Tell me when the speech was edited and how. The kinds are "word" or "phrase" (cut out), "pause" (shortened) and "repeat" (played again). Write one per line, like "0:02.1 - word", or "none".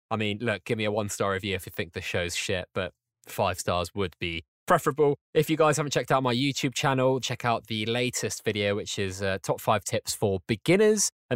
0:07.2 - word